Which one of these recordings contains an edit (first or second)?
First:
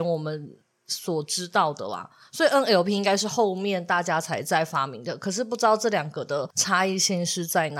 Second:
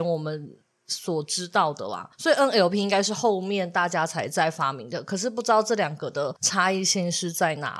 second